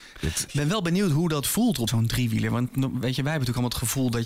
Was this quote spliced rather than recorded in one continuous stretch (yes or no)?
yes